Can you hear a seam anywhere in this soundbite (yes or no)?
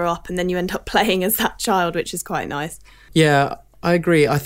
no